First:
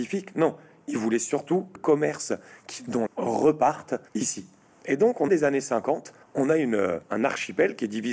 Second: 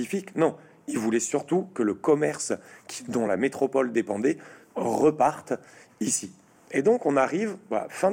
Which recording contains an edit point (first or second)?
first